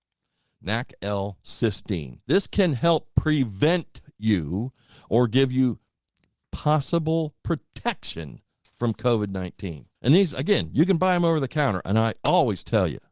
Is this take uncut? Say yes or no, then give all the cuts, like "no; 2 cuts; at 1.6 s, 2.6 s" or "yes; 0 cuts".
no; 2 cuts; at 2.2 s, 10.0 s